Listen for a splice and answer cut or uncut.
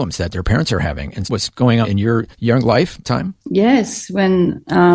cut